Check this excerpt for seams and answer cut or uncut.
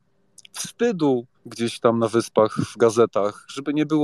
cut